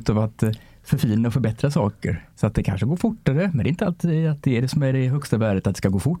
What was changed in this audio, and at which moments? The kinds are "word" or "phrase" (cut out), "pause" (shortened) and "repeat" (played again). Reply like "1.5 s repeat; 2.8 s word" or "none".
2.3 s pause